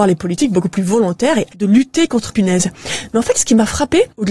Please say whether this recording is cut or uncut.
cut